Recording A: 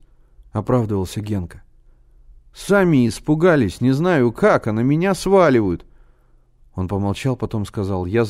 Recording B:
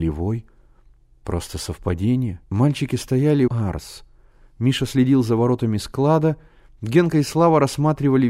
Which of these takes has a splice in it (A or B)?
B